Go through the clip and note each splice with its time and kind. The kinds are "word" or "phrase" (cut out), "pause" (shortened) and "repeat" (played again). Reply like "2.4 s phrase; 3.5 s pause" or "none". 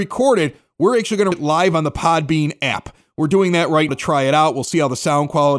1.3 s word; 3.9 s word